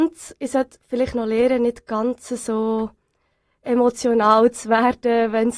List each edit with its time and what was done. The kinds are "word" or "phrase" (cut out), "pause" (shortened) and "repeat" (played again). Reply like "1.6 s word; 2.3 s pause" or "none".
none